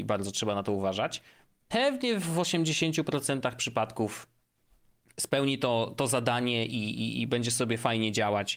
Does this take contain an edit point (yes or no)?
no